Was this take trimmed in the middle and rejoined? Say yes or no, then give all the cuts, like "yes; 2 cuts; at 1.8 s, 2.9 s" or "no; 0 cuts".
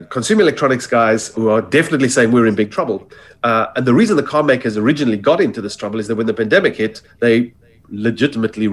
yes; 2 cuts; at 1.3 s, 3.7 s